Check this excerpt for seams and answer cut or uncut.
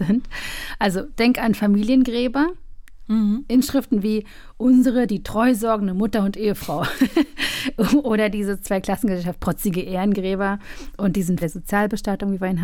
cut